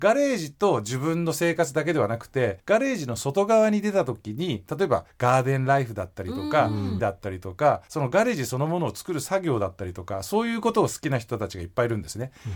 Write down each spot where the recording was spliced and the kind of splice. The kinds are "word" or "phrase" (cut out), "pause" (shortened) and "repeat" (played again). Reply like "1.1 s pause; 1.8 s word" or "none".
2.6 s pause; 7.0 s word; 7.9 s pause